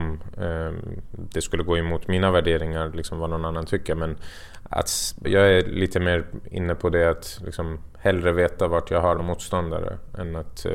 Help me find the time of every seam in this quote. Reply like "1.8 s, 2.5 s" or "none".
5.2 s, 9.2 s